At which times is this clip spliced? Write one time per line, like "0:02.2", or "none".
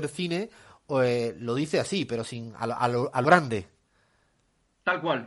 0:03.2